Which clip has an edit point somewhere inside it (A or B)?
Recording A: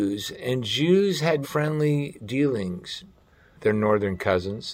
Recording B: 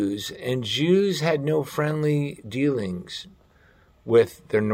A